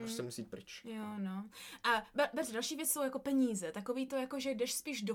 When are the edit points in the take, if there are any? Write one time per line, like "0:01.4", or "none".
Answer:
none